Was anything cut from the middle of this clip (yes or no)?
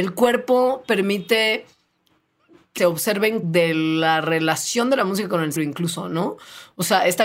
yes